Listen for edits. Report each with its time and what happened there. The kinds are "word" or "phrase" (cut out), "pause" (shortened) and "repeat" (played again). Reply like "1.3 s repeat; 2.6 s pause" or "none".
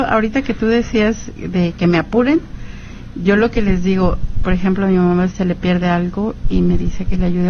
5.3 s word